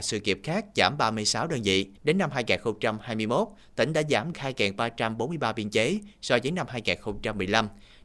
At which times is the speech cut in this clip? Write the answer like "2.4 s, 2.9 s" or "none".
2.0 s, 4.3 s